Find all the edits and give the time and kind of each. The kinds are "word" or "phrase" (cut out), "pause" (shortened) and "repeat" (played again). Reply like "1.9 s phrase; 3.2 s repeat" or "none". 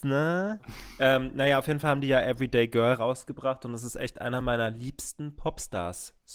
none